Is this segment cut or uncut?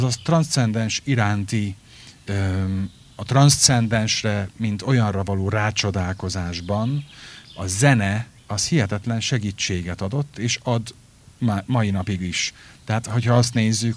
cut